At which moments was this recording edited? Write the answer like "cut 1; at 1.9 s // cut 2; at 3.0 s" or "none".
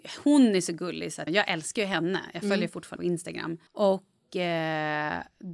cut 1; at 1.3 s // cut 2; at 3.0 s // cut 3; at 3.7 s